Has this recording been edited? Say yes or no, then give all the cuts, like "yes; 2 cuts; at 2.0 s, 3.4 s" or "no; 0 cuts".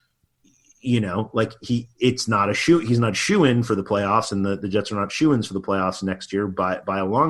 no; 0 cuts